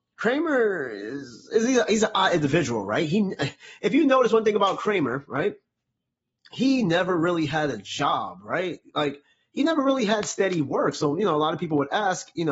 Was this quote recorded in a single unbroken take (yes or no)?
yes